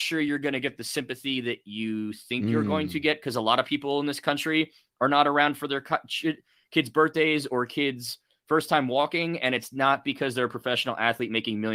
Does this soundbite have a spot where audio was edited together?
no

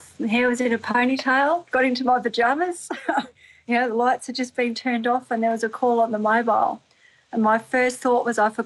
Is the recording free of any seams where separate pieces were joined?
yes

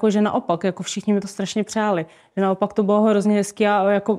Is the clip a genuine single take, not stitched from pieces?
yes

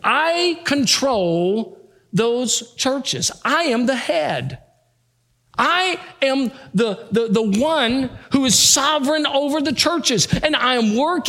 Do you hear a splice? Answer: no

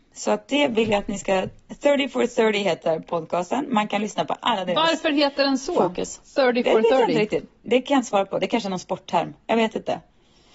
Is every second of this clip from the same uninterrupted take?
no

